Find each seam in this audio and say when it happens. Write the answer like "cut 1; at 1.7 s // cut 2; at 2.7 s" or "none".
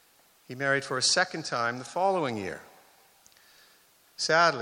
none

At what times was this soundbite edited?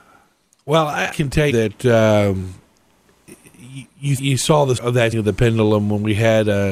cut 1; at 1.1 s // cut 2; at 1.5 s // cut 3; at 4.2 s // cut 4; at 4.8 s // cut 5; at 5.1 s

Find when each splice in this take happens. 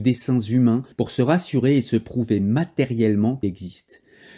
cut 1; at 0.9 s // cut 2; at 3.4 s

